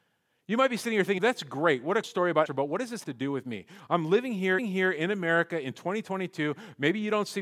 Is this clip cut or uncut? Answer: cut